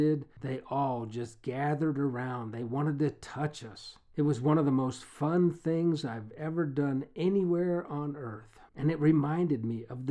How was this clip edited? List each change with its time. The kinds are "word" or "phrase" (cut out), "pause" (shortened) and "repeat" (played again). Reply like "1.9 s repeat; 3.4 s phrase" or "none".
8.7 s pause